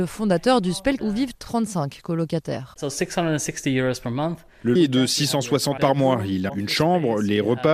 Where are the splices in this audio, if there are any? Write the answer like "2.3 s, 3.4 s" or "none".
1.0 s, 1.3 s, 4.7 s, 5.8 s, 6.5 s